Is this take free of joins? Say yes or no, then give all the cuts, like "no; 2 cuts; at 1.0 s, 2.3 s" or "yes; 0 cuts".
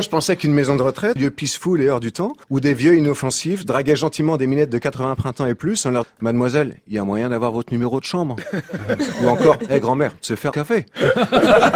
no; 4 cuts; at 1.2 s, 2.4 s, 6.0 s, 10.5 s